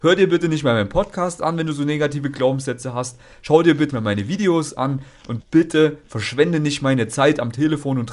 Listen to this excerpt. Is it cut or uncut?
cut